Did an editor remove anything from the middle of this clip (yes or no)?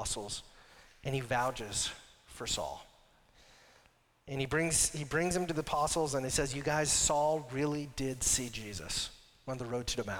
no